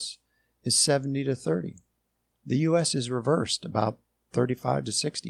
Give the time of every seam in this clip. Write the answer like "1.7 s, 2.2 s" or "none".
none